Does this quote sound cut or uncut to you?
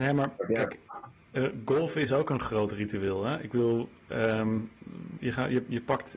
cut